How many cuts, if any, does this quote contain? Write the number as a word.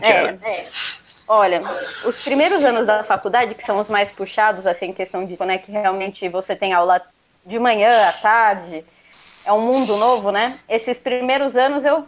one